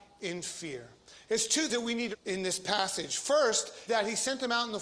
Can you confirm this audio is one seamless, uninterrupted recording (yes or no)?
no